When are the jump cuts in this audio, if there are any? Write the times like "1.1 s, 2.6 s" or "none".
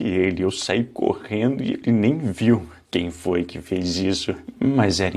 2.8 s